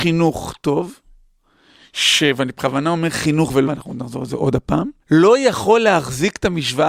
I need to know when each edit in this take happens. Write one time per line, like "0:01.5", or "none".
0:03.6
0:05.0